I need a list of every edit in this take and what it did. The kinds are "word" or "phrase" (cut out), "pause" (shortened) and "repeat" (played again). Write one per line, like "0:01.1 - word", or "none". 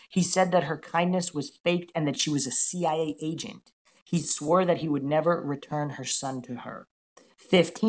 none